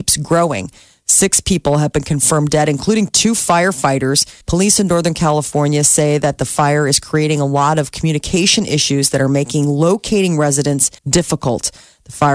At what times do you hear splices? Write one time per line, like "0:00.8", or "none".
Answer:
0:04.4
0:11.0

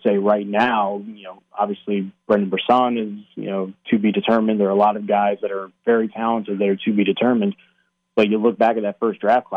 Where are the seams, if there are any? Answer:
none

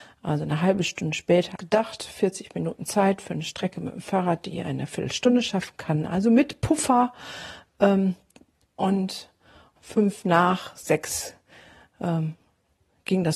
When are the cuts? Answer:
0:01.6
0:09.8

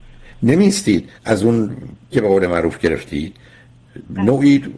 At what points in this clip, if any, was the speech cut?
0:01.2
0:02.1

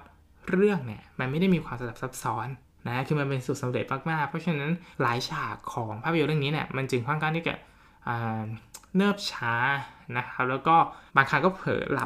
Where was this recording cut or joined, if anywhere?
0:02.6
0:04.9
0:11.1

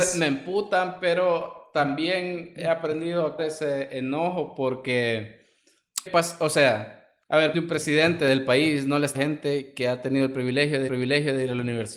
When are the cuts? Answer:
0:03.4
0:06.1
0:07.2
0:07.5
0:09.1
0:10.9

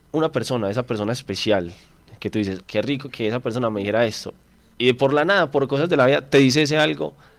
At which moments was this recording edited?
0:02.6

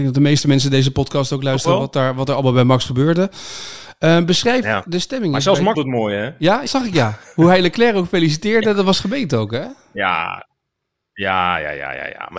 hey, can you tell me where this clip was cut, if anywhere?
0:05.7
0:06.7

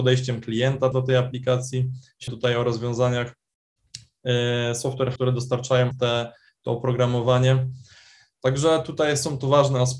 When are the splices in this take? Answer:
0:00.9
0:02.3
0:05.2
0:05.9

